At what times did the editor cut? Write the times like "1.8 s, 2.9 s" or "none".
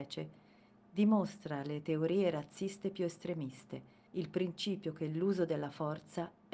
4.1 s